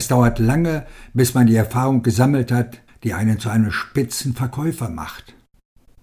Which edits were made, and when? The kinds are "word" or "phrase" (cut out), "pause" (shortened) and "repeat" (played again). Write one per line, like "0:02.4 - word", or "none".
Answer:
0:02.9 - pause